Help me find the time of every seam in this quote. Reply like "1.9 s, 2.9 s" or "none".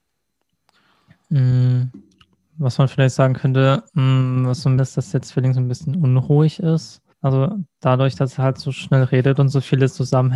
3.9 s, 4.8 s, 7.1 s